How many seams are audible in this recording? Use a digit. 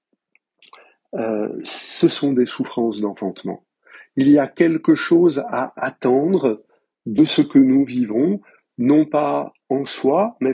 0